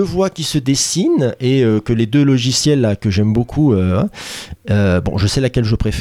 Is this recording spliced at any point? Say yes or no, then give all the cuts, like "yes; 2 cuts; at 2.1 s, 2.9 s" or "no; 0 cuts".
no; 0 cuts